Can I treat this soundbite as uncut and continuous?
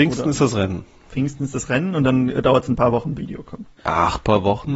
no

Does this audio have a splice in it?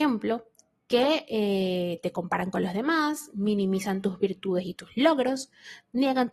no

